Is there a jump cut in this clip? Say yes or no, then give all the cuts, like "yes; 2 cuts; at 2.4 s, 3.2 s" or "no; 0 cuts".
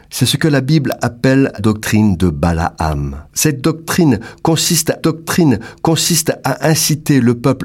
yes; 3 cuts; at 1.6 s, 3.3 s, 5.0 s